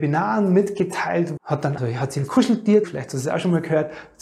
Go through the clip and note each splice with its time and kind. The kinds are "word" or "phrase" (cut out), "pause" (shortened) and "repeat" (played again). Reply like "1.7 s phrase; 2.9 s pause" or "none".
1.4 s word; 1.8 s word; 2.8 s word